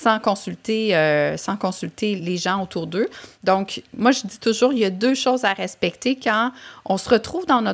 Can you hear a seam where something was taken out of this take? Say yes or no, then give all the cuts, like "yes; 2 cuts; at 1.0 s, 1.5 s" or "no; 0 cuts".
yes; 1 cut; at 2.2 s